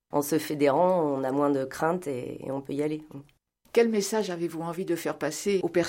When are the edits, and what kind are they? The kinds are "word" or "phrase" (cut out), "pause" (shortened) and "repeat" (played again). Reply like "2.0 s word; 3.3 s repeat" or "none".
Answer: none